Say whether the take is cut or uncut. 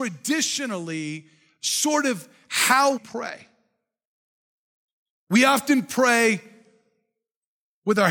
cut